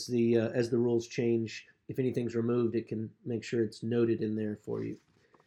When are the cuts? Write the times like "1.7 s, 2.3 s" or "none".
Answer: none